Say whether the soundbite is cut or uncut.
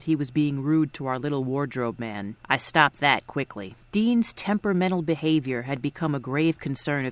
cut